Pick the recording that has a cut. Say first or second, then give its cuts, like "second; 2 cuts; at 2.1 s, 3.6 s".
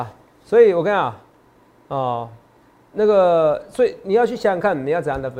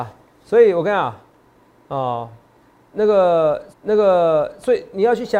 second; 1 cut; at 3.7 s